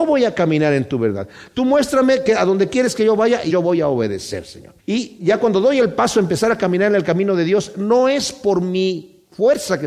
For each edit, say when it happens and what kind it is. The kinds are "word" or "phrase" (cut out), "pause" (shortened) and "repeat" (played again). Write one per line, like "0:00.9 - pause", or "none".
0:03.5 - word
0:04.8 - pause